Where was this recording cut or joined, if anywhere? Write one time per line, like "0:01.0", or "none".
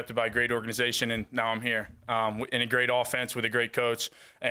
none